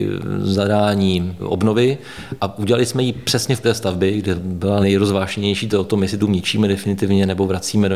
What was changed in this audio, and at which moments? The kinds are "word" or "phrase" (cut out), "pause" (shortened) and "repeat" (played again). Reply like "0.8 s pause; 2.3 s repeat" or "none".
1.4 s word; 3.6 s word; 4.4 s word; 4.8 s word; 5.7 s word; 6.2 s word